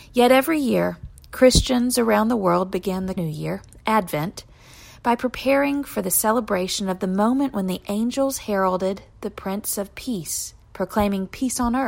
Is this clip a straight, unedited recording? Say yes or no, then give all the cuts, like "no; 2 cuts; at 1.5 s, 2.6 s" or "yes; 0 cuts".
no; 2 cuts; at 3.2 s, 10.6 s